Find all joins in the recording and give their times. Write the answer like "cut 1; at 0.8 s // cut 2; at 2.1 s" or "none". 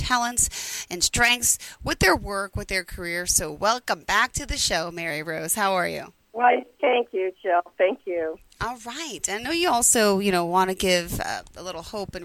cut 1; at 6.2 s